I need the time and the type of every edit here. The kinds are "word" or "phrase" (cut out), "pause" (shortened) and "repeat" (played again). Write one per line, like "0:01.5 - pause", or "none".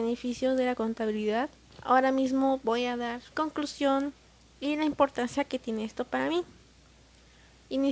0:01.7 - pause
0:03.3 - word